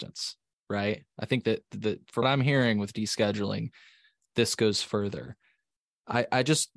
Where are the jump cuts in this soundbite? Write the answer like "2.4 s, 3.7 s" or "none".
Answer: 2.2 s